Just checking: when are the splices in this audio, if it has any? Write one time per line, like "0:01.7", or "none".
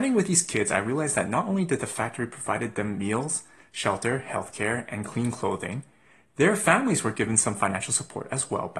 none